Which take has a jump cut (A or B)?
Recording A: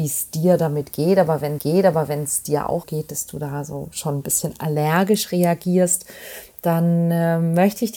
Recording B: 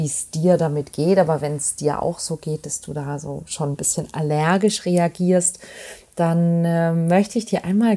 A